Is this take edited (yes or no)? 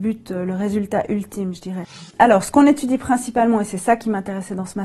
yes